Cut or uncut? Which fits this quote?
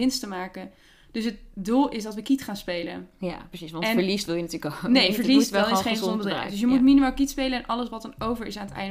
uncut